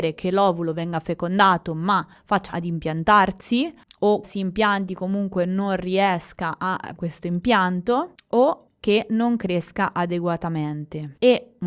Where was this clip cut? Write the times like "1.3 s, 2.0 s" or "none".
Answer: 2.5 s, 4.2 s, 7.0 s